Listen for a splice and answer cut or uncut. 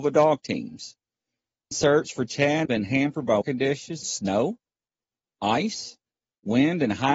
cut